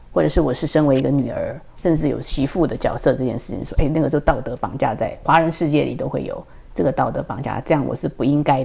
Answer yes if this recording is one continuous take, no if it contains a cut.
yes